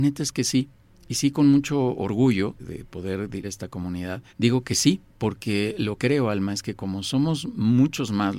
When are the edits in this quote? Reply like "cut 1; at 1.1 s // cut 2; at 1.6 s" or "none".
cut 1; at 2.6 s // cut 2; at 3.4 s // cut 3; at 4.3 s // cut 4; at 5.1 s // cut 5; at 6.0 s // cut 6; at 6.8 s